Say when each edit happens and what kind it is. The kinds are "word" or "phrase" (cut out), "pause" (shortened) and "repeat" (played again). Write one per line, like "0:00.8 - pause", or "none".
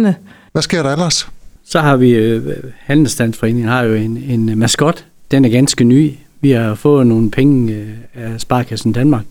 none